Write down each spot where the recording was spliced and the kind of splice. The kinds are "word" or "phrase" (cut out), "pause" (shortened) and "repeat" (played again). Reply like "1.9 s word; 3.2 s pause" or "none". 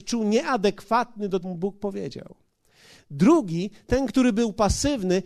1.4 s phrase